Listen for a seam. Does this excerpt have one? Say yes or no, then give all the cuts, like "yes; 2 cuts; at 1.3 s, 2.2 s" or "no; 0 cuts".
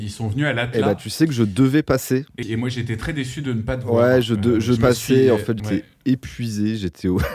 yes; 3 cuts; at 2.4 s, 4.8 s, 5.6 s